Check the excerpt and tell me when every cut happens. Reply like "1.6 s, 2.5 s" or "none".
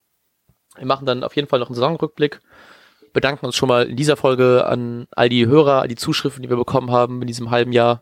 none